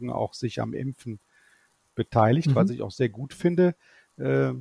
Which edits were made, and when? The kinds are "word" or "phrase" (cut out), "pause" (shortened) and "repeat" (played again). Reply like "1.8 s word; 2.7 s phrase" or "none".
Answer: none